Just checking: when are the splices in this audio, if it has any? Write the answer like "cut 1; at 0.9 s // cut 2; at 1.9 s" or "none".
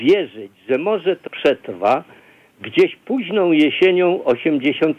cut 1; at 1.3 s